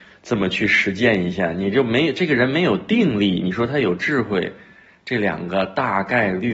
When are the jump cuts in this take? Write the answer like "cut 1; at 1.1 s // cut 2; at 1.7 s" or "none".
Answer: none